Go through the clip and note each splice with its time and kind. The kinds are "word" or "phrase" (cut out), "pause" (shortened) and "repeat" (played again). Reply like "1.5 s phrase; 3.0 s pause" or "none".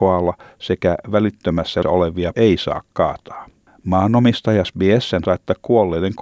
1.8 s word; 2.3 s word; 4.6 s word; 5.2 s word